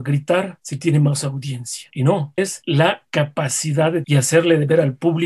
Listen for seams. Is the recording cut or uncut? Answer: cut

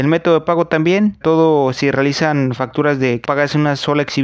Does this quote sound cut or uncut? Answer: cut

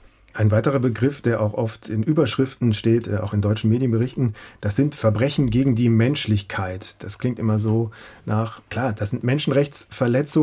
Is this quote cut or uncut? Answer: cut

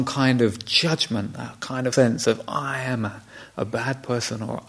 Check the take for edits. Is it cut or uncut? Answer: cut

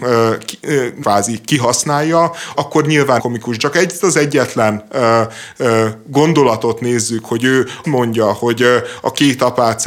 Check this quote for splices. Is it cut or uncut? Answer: cut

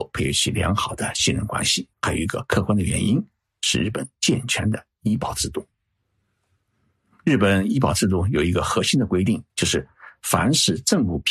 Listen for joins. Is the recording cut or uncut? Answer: cut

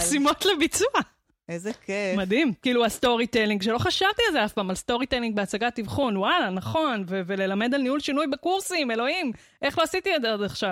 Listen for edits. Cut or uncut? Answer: uncut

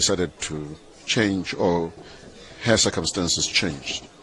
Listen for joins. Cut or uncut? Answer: uncut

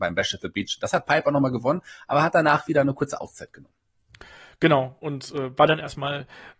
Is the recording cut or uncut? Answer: uncut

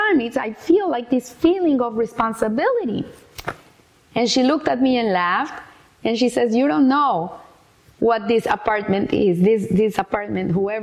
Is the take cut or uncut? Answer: uncut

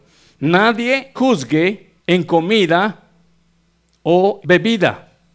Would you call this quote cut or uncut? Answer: cut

